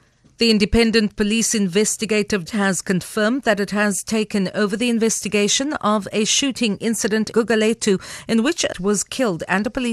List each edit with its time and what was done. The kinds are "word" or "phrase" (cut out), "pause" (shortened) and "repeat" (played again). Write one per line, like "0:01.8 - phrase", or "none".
0:02.5 - word
0:07.3 - word
0:08.7 - word